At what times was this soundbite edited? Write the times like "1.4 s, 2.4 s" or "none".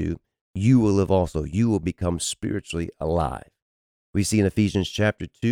none